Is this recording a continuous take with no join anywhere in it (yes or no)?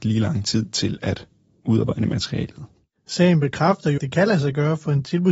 no